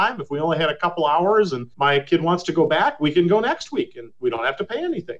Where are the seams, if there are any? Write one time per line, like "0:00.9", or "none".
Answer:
0:01.7